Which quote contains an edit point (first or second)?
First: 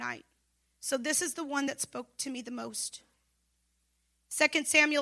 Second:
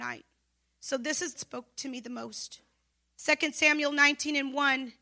second